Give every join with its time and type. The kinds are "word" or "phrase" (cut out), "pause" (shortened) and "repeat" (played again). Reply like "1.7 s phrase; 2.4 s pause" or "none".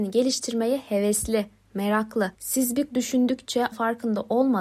2.3 s pause; 2.9 s word; 3.7 s word